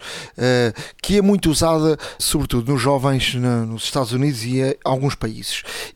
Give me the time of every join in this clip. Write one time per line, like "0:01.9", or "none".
0:02.2